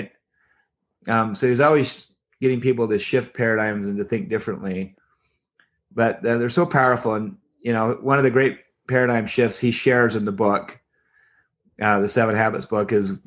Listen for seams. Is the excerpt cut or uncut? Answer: uncut